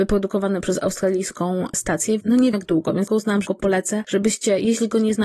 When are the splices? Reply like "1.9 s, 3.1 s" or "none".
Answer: 2.2 s, 2.5 s, 3.1 s, 3.5 s